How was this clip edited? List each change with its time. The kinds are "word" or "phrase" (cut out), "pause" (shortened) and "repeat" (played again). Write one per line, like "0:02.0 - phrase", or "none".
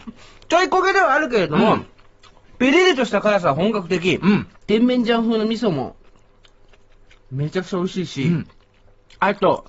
0:04.6 - pause